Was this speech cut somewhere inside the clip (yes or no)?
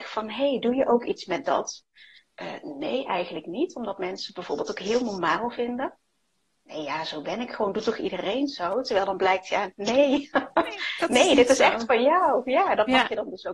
no